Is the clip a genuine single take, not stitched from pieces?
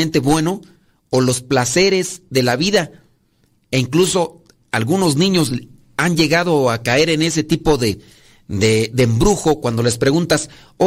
yes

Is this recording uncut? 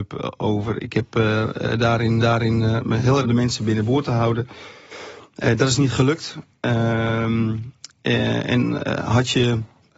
no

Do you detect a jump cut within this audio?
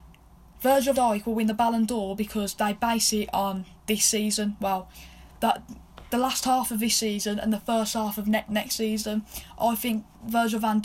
yes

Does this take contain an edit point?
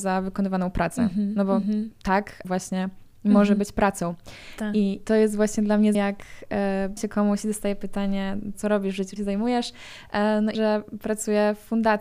yes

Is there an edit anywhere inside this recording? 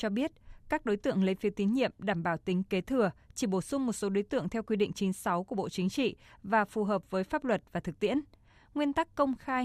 no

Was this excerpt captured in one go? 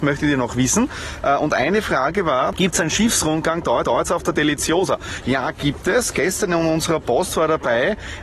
no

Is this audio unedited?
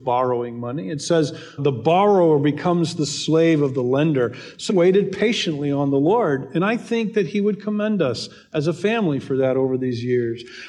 no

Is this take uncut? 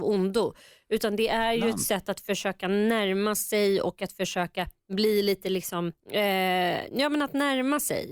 no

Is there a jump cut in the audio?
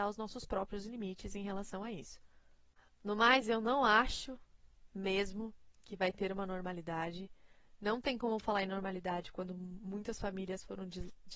no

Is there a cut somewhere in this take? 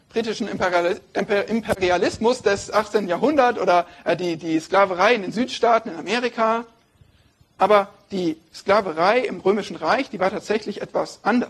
no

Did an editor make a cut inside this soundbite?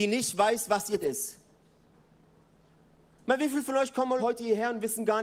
yes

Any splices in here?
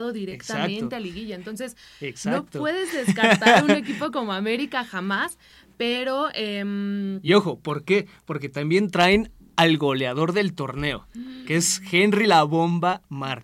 no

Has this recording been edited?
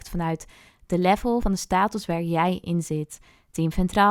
no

